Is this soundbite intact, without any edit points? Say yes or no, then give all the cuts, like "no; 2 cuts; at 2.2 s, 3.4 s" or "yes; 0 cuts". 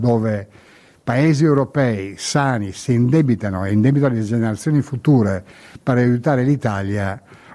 yes; 0 cuts